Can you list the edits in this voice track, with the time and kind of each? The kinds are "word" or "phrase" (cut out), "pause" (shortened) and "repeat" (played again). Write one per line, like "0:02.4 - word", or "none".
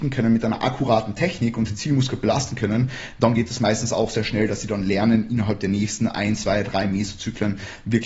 none